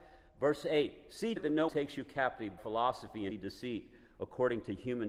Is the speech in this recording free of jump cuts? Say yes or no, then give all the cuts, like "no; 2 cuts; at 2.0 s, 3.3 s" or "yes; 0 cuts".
no; 4 cuts; at 1.4 s, 1.7 s, 2.6 s, 3.3 s